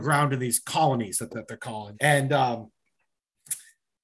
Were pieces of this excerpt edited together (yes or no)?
yes